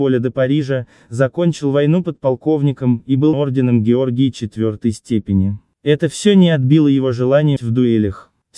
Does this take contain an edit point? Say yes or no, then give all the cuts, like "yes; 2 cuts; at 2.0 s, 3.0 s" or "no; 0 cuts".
yes; 2 cuts; at 3.3 s, 7.6 s